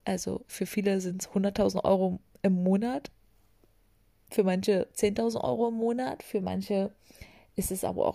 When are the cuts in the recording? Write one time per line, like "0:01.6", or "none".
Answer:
none